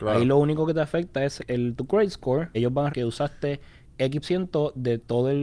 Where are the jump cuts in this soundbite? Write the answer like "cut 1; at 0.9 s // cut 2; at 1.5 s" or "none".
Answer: cut 1; at 1.4 s // cut 2; at 2.5 s // cut 3; at 2.9 s // cut 4; at 4.2 s